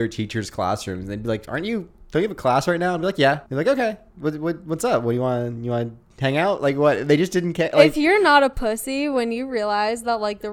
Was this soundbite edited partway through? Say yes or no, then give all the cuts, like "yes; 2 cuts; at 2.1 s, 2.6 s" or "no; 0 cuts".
yes; 1 cut; at 3.5 s